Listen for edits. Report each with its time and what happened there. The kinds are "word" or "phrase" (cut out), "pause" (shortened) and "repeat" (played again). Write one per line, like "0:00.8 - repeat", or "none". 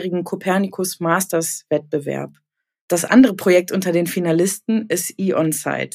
none